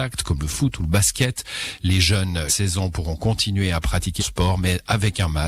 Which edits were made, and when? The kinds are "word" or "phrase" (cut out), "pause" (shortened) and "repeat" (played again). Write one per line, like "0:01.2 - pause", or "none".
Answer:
0:02.5 - word
0:04.2 - word